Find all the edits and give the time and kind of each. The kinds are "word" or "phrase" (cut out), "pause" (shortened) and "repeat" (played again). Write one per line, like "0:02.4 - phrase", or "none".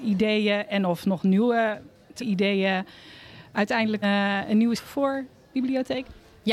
0:02.2 - word
0:04.0 - word
0:04.8 - phrase

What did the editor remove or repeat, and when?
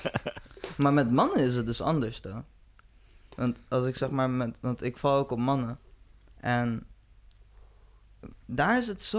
none

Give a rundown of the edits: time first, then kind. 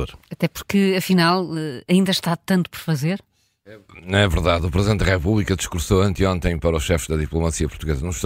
none

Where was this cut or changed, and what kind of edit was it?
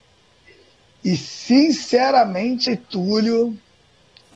0:02.7 - word

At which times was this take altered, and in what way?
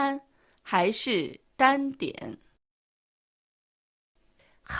none

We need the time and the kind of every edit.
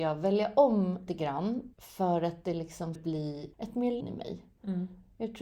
0:01.1 - word
0:01.7 - pause
0:03.0 - word
0:03.5 - pause
0:04.0 - word

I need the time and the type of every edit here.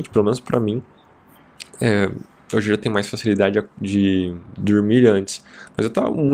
none

